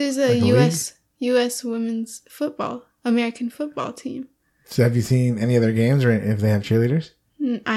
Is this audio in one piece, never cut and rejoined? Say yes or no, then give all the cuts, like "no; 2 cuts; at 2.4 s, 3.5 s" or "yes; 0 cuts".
yes; 0 cuts